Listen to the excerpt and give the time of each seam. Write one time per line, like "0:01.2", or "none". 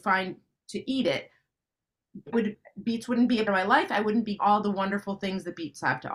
0:02.3
0:03.5
0:04.4